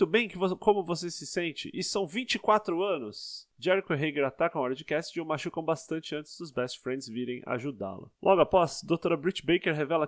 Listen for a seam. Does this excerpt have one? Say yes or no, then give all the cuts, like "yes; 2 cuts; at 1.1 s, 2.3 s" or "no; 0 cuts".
yes; 1 cut; at 8.2 s